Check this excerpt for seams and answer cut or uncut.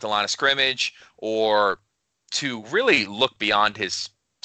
uncut